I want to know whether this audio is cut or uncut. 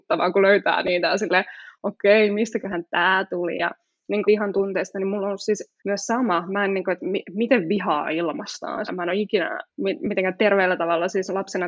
cut